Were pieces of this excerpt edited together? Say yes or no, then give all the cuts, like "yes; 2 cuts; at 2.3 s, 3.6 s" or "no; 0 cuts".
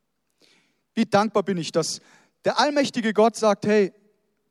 no; 0 cuts